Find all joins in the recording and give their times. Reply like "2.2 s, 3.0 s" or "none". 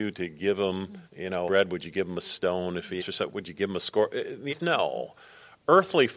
1.1 s, 1.5 s, 3.0 s, 4.5 s